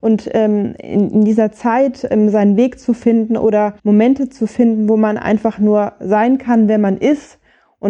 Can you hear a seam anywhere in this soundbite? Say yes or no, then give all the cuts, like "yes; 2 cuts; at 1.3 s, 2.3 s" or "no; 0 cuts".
yes; 1 cut; at 3.8 s